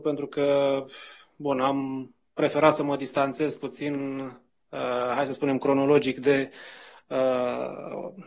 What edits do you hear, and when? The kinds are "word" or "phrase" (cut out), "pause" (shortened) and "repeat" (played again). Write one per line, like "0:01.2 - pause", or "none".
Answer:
none